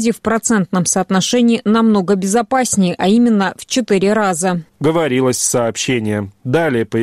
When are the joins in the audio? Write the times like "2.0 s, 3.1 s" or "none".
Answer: 4.7 s